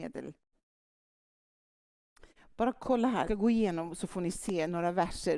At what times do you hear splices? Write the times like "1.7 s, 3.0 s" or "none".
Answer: 3.2 s